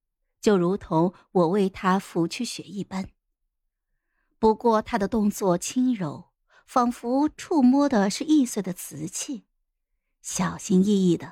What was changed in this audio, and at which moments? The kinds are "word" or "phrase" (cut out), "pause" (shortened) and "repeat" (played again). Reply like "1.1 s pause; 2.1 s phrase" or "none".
none